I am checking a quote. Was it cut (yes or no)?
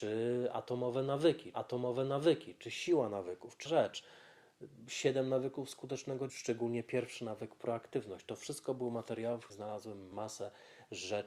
yes